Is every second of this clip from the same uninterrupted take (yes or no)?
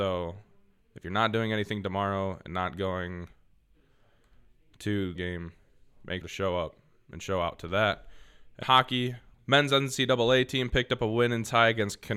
no